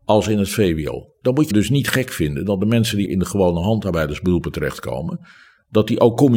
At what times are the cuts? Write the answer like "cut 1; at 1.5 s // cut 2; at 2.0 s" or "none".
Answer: cut 1; at 1.5 s // cut 2; at 3.1 s